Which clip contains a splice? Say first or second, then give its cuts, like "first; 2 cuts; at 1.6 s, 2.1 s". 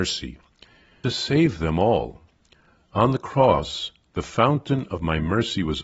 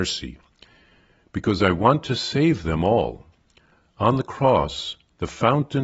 first; 1 cut; at 1.0 s